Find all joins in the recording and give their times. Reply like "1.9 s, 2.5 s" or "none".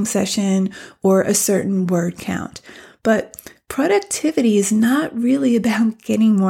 none

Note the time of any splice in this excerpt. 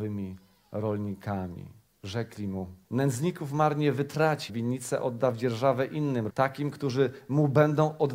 2.8 s, 4.5 s, 6.3 s

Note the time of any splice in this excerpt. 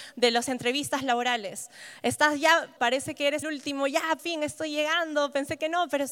2.8 s, 3.4 s, 4.2 s

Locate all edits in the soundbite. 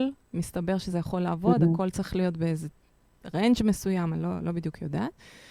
none

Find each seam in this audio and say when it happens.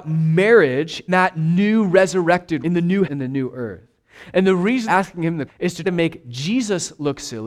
1.1 s, 2.6 s, 3.0 s, 4.9 s, 5.5 s, 5.8 s

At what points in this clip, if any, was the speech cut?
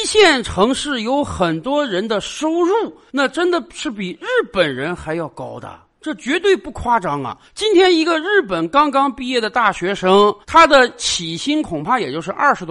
7.5 s, 10.4 s

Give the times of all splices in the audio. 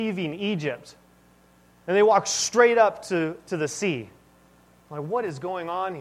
none

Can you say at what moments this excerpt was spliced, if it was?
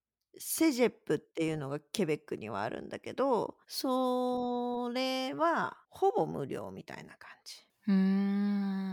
3.6 s, 5.8 s

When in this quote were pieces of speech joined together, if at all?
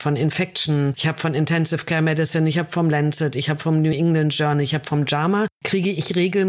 none

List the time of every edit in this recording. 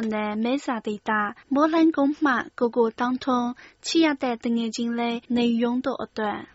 1.4 s, 5.2 s

